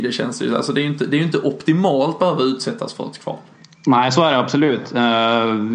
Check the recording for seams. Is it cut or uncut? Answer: cut